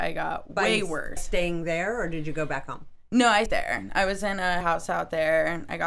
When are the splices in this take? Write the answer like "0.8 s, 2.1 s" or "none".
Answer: 1.2 s, 3.5 s, 4.6 s